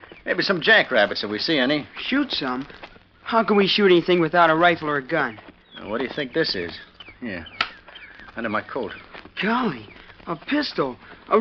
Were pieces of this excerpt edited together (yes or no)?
no